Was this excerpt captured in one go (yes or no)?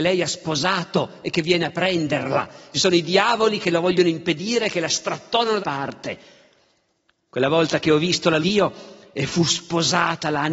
no